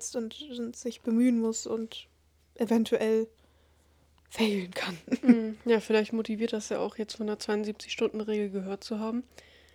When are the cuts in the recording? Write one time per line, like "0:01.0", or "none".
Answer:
none